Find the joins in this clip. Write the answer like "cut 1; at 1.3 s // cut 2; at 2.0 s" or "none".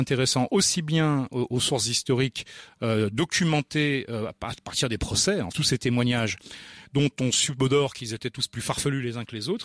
cut 1; at 5.5 s